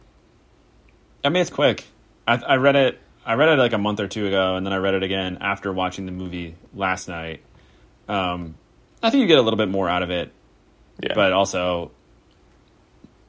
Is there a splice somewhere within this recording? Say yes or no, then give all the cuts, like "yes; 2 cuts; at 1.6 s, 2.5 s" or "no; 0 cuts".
yes; 1 cut; at 1.5 s